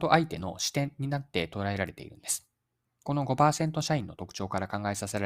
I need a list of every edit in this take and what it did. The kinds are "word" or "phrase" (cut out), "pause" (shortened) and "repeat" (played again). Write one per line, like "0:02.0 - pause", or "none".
0:02.8 - pause